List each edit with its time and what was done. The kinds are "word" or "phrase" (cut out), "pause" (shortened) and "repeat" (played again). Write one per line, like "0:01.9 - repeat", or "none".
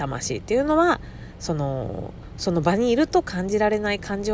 none